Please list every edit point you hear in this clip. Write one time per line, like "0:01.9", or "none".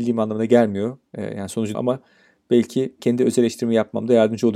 0:01.1
0:01.7
0:03.0

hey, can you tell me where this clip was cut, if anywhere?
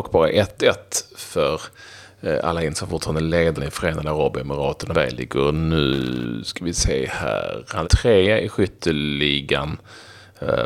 0:03.6
0:04.9
0:07.8

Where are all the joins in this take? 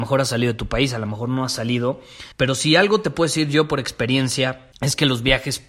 0:02.3
0:04.7

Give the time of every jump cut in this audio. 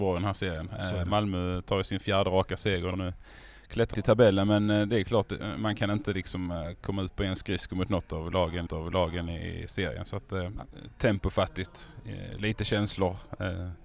0:02.9
0:03.9
0:08.7

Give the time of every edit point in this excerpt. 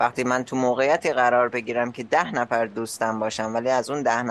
none

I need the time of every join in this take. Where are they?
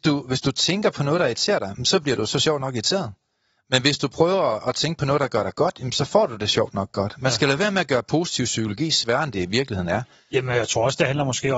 none

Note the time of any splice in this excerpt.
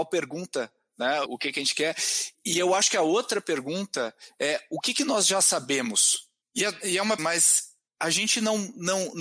0:01.3
0:02.3
0:07.2

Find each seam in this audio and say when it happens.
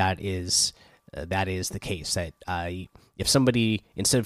none

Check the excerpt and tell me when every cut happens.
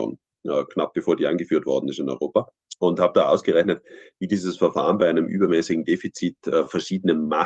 none

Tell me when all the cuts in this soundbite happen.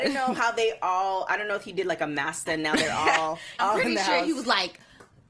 0:02.5
0:03.6

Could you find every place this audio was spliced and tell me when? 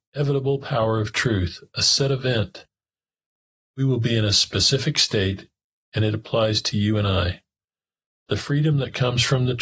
none

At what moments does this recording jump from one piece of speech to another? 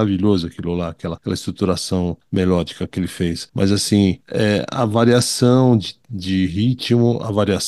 none

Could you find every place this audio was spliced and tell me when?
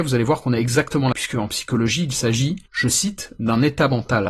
0:01.1
0:02.7

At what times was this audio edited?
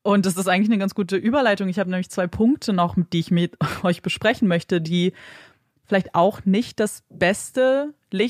none

